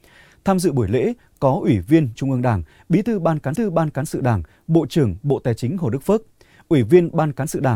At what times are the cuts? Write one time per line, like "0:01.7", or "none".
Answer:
0:02.1
0:03.6